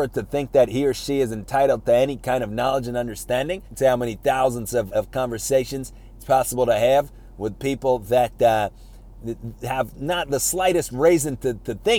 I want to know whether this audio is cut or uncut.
cut